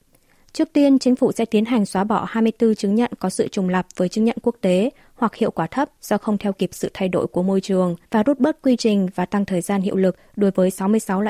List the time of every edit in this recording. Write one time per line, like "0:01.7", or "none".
0:08.0